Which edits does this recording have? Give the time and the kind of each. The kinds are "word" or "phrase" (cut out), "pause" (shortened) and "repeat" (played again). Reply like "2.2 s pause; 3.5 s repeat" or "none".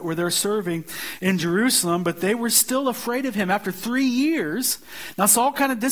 none